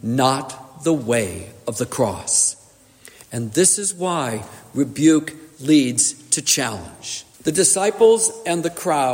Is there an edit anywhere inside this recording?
yes; 1 cut; at 7.3 s

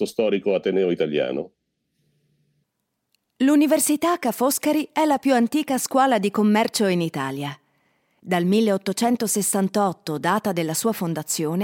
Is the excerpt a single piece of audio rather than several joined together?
yes; 0 cuts

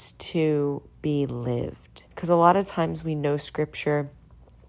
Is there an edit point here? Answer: yes; 1 cut; at 2.1 s

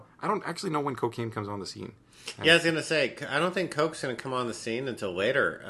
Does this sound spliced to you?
no; 0 cuts

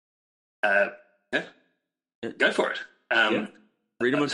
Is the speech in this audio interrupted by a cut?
no; 0 cuts

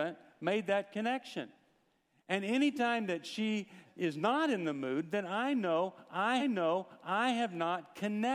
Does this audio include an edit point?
yes; 2 cuts; at 3.8 s, 6.4 s

